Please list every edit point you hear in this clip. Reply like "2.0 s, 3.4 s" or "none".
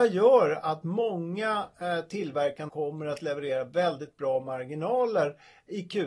2.7 s